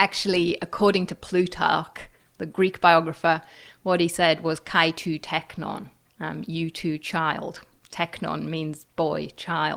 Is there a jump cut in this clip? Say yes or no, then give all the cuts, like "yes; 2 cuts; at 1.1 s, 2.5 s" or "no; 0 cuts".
yes; 1 cut; at 6.1 s